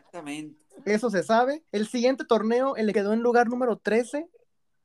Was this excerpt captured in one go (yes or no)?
no